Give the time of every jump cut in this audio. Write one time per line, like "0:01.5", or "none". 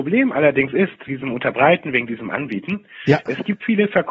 0:01.1